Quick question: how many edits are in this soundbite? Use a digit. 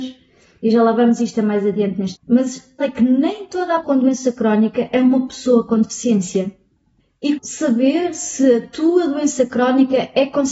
4